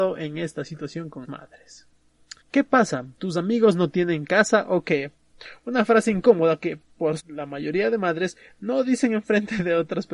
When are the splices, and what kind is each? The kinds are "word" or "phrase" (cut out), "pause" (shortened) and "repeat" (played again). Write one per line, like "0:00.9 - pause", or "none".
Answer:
0:01.2 - word
0:02.4 - pause
0:07.2 - word